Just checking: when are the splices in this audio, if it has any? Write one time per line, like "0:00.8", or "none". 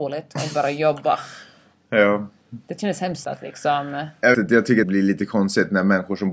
0:03.2
0:04.3
0:04.8